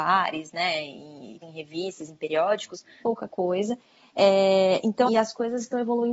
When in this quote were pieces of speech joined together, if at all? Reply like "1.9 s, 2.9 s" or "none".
1.4 s, 3.0 s, 5.1 s

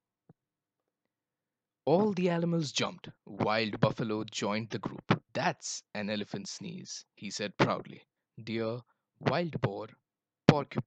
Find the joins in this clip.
3.2 s, 5.3 s, 8.2 s

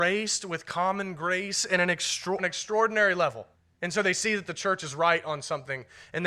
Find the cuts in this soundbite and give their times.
2.4 s, 3.5 s

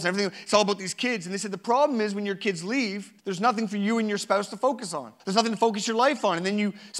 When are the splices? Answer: 3.2 s, 5.2 s

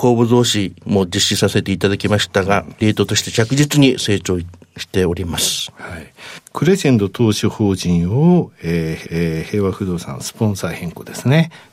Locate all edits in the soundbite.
9.0 s

